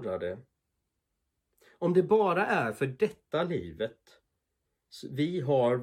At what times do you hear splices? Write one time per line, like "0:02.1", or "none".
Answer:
none